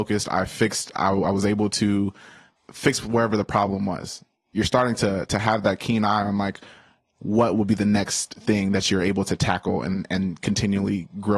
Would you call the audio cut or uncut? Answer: uncut